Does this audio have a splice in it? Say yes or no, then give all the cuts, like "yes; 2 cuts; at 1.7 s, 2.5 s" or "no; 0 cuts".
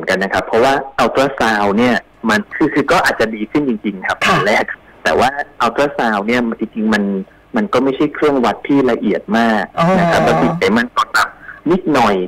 no; 0 cuts